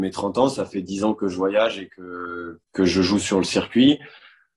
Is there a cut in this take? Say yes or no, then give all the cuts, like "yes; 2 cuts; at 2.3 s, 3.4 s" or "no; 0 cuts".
yes; 1 cut; at 2.6 s